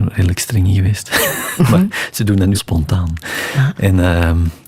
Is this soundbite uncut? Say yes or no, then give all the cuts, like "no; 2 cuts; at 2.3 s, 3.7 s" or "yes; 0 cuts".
no; 1 cut; at 2.5 s